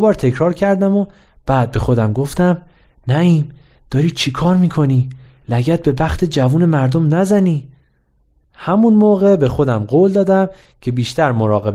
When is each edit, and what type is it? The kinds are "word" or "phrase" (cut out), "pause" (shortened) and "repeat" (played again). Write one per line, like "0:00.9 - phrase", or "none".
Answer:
none